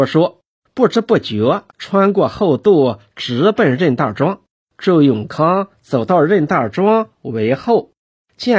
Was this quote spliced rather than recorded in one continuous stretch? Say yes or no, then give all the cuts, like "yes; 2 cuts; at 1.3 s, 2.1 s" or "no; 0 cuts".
yes; 2 cuts; at 1.7 s, 4.6 s